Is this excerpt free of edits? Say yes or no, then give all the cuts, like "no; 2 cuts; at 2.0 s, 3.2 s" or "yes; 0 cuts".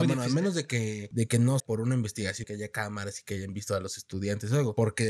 no; 2 cuts; at 1.6 s, 2.4 s